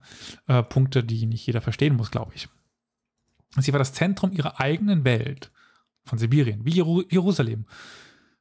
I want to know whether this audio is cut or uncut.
uncut